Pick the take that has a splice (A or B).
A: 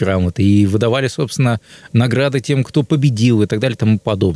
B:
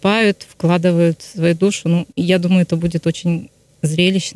B